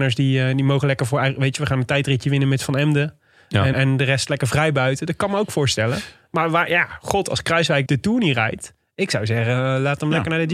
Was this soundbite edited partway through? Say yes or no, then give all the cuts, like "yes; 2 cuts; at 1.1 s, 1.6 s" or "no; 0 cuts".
yes; 2 cuts; at 3.7 s, 7.9 s